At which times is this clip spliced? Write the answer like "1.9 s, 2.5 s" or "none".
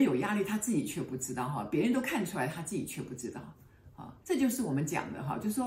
4.2 s